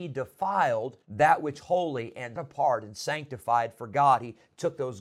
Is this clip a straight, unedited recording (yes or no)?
no